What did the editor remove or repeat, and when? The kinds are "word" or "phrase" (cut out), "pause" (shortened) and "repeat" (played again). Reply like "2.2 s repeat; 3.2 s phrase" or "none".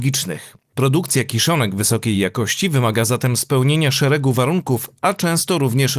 none